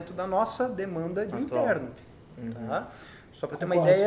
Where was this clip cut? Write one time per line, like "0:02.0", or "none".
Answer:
0:01.3